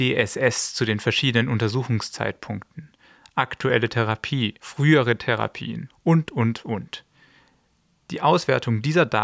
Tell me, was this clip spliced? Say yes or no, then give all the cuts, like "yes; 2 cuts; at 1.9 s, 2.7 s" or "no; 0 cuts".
no; 0 cuts